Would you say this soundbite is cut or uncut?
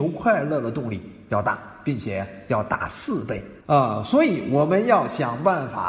cut